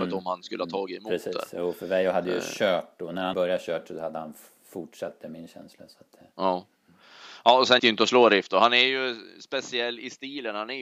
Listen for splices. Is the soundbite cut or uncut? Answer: cut